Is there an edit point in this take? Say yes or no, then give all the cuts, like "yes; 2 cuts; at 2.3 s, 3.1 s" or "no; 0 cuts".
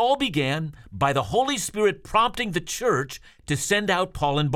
no; 0 cuts